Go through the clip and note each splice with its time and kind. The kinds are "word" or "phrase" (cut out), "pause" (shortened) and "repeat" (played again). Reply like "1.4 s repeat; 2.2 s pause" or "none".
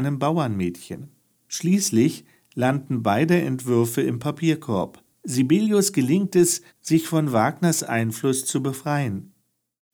1.3 s pause; 5.1 s pause; 6.7 s pause